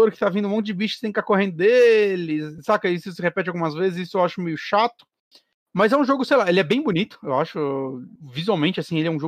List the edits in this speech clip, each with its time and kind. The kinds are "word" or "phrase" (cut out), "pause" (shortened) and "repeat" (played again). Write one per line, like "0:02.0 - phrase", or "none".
none